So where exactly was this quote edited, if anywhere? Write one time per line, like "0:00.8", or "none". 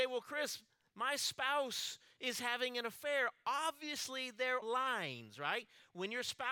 0:04.6